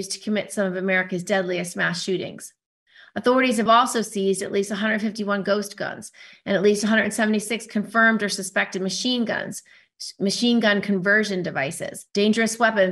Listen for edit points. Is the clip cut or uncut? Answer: uncut